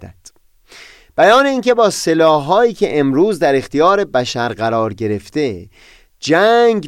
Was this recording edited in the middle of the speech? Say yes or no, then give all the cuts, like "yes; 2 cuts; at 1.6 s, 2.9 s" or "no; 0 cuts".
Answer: no; 0 cuts